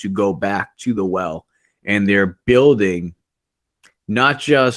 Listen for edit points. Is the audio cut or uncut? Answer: uncut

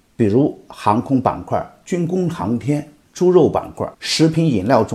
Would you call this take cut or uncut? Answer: cut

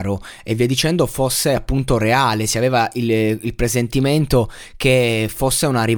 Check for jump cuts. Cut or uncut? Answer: uncut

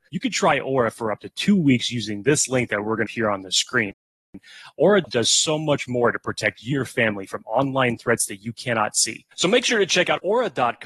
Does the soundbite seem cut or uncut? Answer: cut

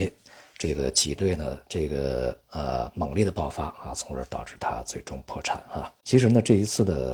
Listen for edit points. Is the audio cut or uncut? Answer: cut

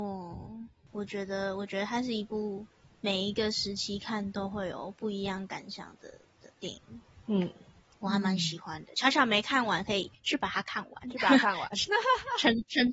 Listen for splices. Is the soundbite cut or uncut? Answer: uncut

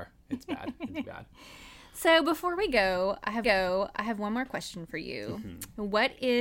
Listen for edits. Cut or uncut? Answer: cut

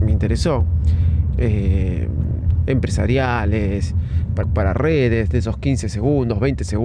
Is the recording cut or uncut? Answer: cut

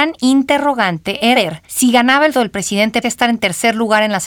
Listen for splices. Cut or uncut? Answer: cut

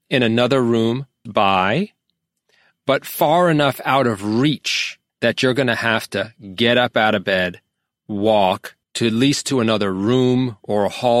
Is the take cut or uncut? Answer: cut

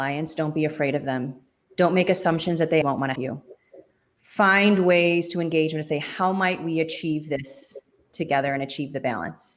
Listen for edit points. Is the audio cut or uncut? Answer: cut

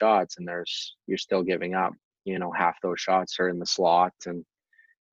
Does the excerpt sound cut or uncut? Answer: uncut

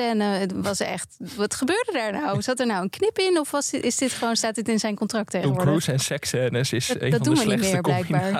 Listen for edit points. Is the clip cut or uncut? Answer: uncut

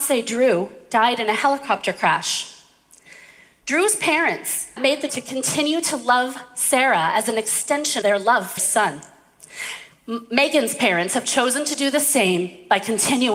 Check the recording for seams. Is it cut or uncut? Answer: cut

